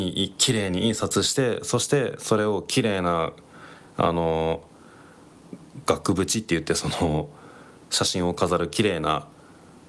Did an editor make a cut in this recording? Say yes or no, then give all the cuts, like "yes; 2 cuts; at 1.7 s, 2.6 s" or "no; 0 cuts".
no; 0 cuts